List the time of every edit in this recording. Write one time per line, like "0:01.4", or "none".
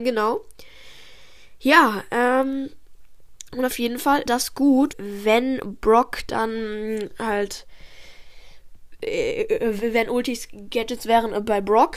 0:04.3
0:04.9